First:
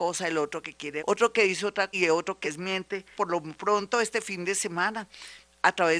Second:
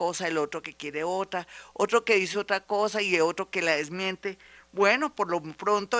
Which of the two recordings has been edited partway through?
first; 4 cuts; at 1.0 s, 1.9 s, 2.4 s, 3.1 s

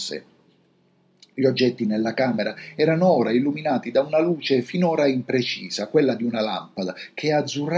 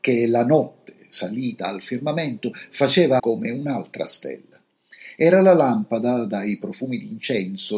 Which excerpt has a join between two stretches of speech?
second; 1 cut; at 3.2 s

